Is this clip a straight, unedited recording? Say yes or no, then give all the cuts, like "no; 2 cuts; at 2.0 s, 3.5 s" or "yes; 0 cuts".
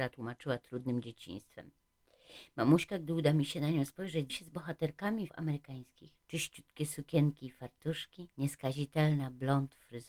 no; 4 cuts; at 4.3 s, 5.3 s, 6.2 s, 8.3 s